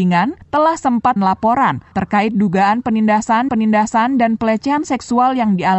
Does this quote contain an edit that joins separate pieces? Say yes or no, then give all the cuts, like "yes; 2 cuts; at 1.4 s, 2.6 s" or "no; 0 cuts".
yes; 2 cuts; at 1.2 s, 3.5 s